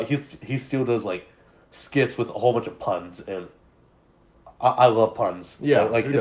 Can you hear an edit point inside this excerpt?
no; 0 cuts

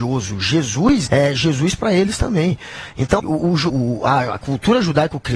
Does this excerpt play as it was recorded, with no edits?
no; 3 cuts; at 1.1 s, 3.2 s, 3.7 s

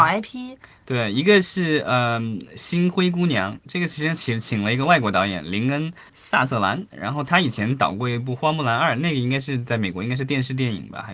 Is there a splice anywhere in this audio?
yes; 1 cut; at 6.1 s

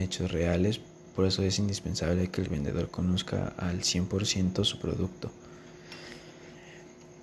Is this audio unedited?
yes; 0 cuts

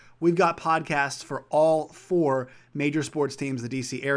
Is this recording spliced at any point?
no; 0 cuts

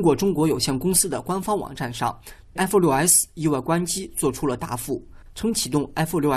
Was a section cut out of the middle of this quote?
yes; 1 cut; at 2.6 s

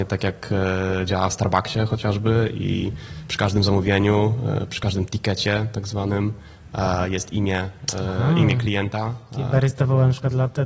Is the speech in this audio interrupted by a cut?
no; 0 cuts

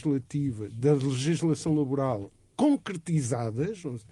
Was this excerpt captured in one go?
yes; 0 cuts

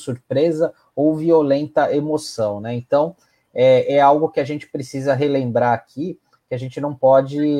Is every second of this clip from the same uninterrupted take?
yes; 0 cuts

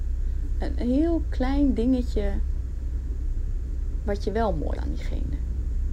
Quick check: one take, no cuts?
no; 1 cut; at 4.8 s

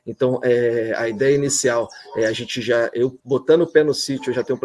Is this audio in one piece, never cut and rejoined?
no; 1 cut; at 3.2 s

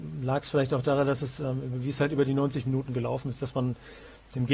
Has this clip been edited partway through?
no; 0 cuts

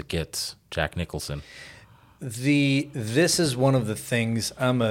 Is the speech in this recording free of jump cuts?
yes; 0 cuts

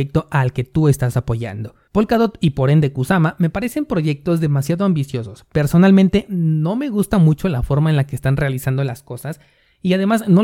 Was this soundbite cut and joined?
yes; 1 cut; at 1.9 s

